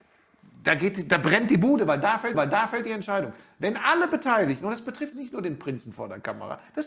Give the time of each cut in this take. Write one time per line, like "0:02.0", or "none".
0:02.3
0:05.1